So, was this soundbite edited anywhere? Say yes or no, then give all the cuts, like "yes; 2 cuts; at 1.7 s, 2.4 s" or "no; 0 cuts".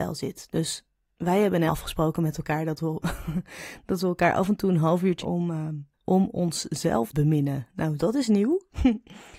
yes; 4 cuts; at 1.7 s, 5.2 s, 5.9 s, 7.1 s